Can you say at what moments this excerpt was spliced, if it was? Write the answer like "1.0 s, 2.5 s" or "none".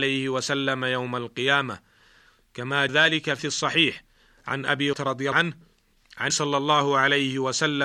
2.9 s, 3.4 s, 4.9 s, 5.3 s, 6.3 s